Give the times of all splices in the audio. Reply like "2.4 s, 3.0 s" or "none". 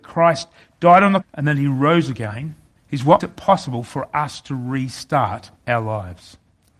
1.2 s, 2.8 s, 3.2 s, 5.6 s